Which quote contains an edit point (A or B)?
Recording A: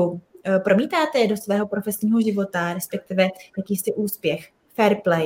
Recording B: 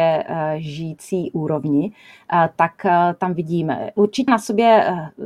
B